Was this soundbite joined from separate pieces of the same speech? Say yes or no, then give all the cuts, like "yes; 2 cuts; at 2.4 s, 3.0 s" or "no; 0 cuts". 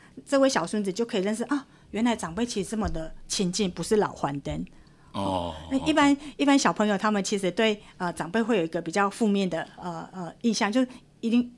no; 0 cuts